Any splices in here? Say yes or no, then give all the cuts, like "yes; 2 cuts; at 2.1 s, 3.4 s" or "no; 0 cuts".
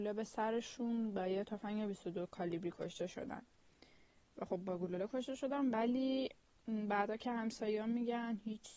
no; 0 cuts